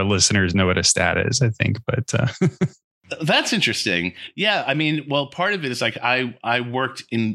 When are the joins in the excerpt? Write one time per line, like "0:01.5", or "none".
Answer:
none